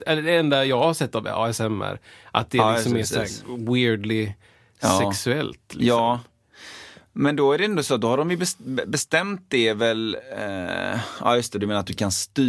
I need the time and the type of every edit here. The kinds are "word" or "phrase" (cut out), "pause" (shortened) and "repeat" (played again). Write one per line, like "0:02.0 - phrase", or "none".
none